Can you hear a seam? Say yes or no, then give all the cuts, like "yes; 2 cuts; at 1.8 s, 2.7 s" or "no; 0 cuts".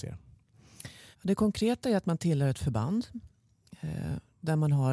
yes; 1 cut; at 1.1 s